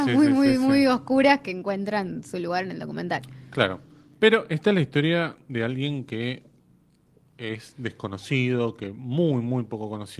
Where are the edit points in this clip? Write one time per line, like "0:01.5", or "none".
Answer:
none